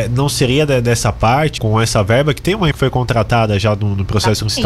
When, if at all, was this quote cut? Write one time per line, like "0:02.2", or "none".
0:01.6
0:02.7